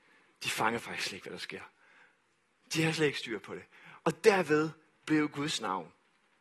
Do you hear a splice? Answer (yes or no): no